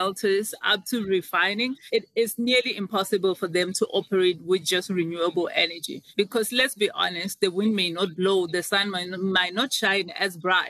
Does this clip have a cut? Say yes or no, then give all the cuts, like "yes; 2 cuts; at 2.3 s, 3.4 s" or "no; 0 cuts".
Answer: no; 0 cuts